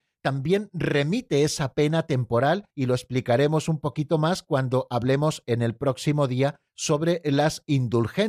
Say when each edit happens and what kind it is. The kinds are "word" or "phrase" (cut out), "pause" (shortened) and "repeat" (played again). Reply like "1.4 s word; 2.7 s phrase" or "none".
2.7 s pause; 6.7 s pause